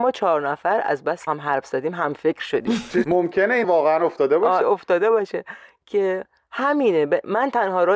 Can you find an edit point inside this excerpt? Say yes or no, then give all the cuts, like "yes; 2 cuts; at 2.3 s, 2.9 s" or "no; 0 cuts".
yes; 4 cuts; at 1.3 s, 3.0 s, 3.6 s, 4.6 s